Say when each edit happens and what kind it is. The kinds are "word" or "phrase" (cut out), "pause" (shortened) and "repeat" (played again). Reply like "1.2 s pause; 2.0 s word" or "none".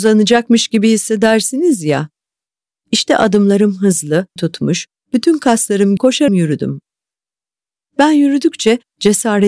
4.4 s word; 6.0 s word; 6.3 s word